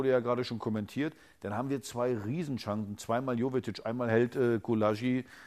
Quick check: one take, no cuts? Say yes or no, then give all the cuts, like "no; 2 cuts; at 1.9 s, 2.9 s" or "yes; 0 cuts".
yes; 0 cuts